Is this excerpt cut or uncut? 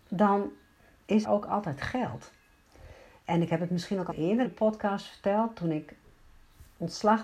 cut